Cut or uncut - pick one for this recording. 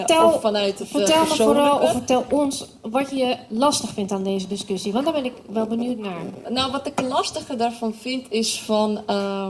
uncut